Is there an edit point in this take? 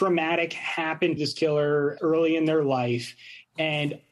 yes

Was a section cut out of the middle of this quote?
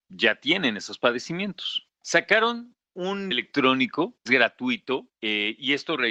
yes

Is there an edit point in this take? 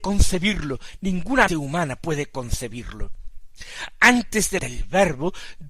yes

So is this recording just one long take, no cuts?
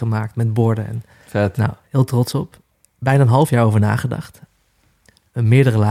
no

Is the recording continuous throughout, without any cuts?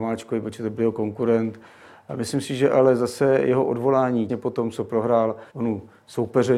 no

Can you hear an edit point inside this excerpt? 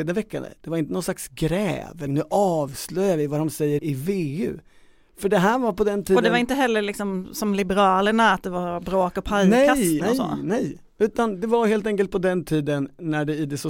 yes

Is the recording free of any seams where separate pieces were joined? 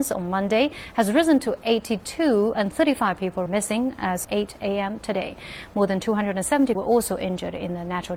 no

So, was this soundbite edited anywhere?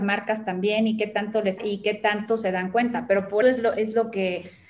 yes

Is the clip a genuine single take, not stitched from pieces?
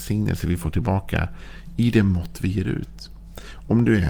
yes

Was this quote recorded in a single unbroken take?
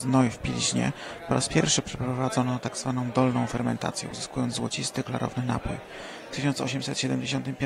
yes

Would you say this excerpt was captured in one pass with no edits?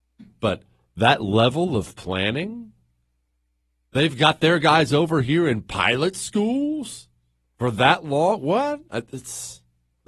yes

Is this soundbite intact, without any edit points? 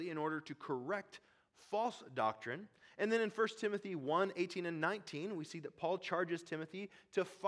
yes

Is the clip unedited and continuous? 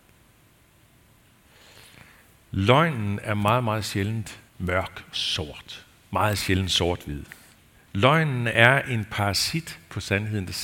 no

